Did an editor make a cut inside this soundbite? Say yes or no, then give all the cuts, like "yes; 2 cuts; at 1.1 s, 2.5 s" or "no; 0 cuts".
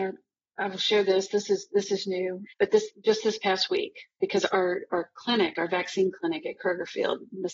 yes; 1 cut; at 2.5 s